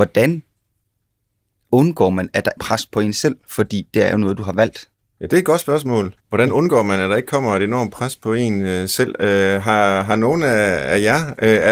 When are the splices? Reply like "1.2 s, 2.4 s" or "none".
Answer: 2.6 s, 6.2 s